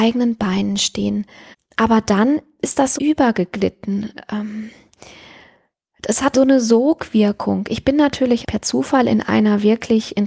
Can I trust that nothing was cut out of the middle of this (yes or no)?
no